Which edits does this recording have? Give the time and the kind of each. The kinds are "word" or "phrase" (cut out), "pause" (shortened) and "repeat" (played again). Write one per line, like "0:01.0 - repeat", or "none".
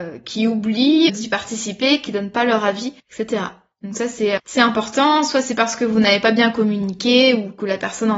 0:01.1 - word
0:03.0 - pause
0:04.4 - word

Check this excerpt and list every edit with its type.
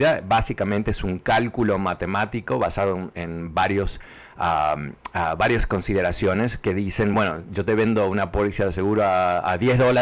none

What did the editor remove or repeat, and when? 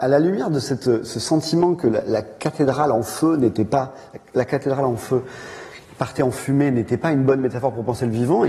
none

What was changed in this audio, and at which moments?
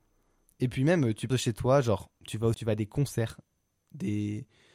0:01.3 - phrase
0:02.5 - word

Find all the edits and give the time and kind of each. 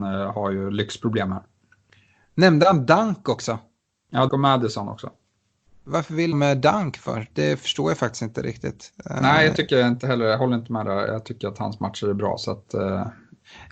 0:04.3 - word
0:06.3 - phrase

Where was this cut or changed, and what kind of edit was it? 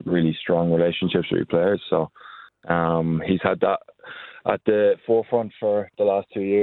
none

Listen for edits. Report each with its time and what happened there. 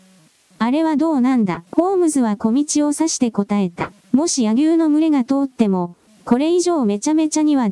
0:01.7 - pause
0:04.0 - pause

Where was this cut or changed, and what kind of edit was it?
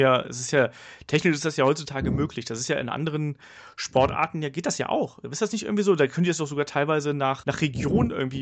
0:07.4 - word

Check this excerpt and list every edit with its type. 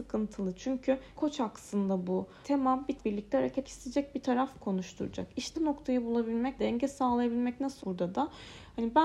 0:01.1 - word
0:02.4 - word
0:03.0 - word
0:03.6 - word
0:04.6 - word
0:05.5 - word
0:06.6 - word
0:07.8 - word

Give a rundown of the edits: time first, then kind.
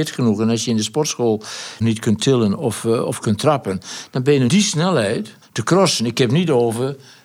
0:01.8 - phrase
0:04.5 - phrase
0:05.4 - pause

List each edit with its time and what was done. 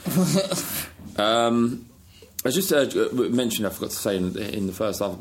none

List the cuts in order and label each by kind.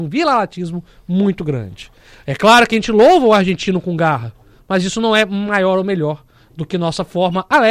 none

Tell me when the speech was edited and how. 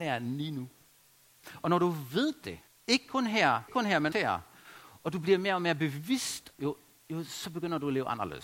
0:02.7 - pause
0:03.7 - word
0:04.1 - word
0:06.5 - phrase

